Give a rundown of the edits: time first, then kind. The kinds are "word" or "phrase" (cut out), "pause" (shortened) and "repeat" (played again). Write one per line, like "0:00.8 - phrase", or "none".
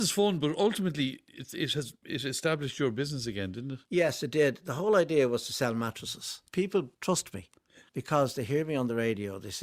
0:03.8 - pause
0:06.9 - pause
0:07.9 - pause